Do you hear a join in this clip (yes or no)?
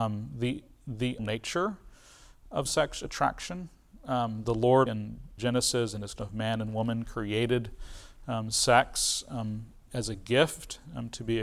yes